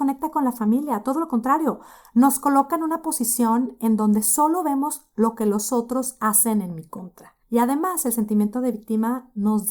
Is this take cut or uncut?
uncut